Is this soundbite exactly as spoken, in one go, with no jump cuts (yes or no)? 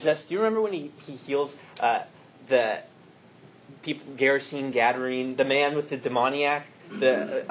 yes